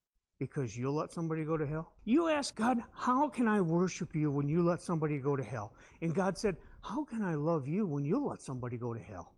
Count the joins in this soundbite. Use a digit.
2